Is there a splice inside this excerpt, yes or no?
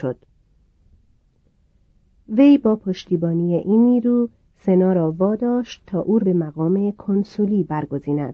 yes